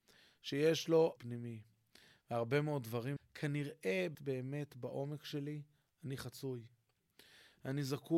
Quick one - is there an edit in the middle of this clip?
yes; 3 cuts; at 1.2 s, 3.2 s, 4.1 s

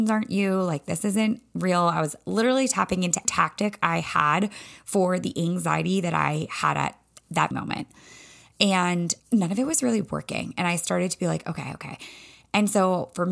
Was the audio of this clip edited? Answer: yes; 3 cuts; at 3.2 s, 7.5 s, 9.2 s

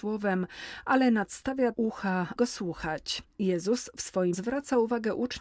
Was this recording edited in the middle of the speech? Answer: yes; 3 cuts; at 1.7 s, 2.4 s, 4.3 s

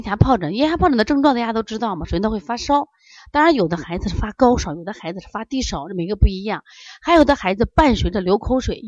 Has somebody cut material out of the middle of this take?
no; 0 cuts

